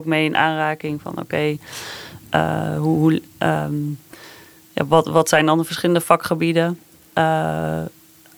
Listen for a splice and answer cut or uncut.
uncut